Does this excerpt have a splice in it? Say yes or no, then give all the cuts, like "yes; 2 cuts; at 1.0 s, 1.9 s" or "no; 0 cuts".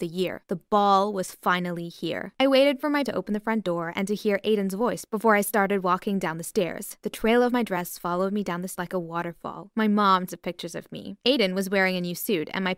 yes; 3 cuts; at 3.0 s, 8.8 s, 10.3 s